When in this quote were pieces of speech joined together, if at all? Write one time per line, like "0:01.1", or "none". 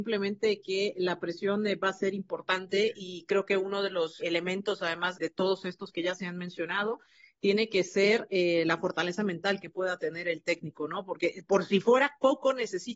0:04.2
0:05.1